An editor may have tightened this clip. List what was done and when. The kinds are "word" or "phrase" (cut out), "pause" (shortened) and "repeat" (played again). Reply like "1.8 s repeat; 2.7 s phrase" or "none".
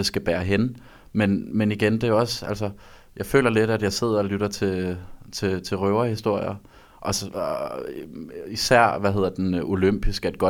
none